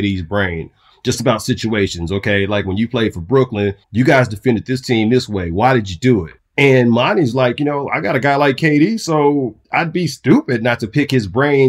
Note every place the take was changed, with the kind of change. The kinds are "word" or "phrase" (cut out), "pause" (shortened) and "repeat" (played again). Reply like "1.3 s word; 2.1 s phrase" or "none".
3.8 s pause; 6.4 s pause; 9.6 s pause